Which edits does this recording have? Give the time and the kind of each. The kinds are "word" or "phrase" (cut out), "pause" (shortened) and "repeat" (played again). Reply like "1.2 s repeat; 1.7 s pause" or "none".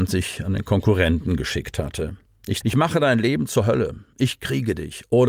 2.6 s word